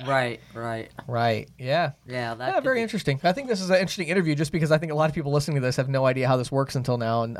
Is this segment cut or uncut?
uncut